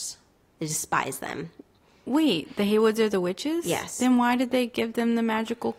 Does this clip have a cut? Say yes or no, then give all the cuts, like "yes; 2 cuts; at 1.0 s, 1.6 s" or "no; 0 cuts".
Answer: no; 0 cuts